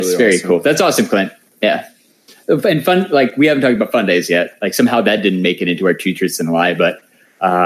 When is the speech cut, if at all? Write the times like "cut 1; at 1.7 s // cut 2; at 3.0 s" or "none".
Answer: none